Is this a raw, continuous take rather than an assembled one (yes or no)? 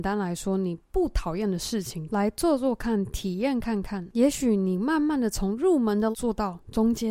no